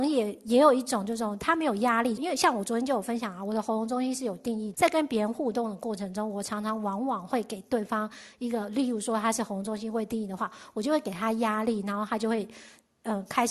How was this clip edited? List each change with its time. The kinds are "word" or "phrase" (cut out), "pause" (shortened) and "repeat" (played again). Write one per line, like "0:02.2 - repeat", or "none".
0:02.2 - phrase
0:04.7 - word